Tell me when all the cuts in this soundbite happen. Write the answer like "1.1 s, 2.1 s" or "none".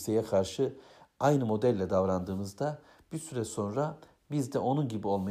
none